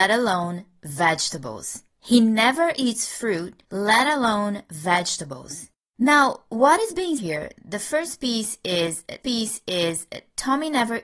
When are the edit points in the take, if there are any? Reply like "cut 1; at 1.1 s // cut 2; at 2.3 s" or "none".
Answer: cut 1; at 1.9 s // cut 2; at 3.6 s // cut 3; at 5.9 s // cut 4; at 7.2 s // cut 5; at 9.2 s